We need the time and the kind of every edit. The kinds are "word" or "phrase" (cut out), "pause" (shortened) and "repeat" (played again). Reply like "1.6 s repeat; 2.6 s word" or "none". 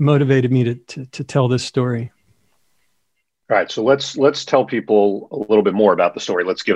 none